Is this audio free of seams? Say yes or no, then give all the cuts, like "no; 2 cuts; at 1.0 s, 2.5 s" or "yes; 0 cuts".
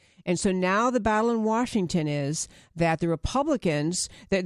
yes; 0 cuts